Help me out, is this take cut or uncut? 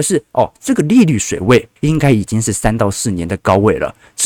cut